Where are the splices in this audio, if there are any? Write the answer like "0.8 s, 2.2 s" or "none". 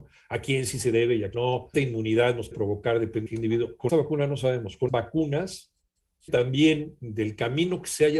1.3 s, 1.7 s, 2.5 s, 3.3 s, 3.9 s, 4.9 s, 6.3 s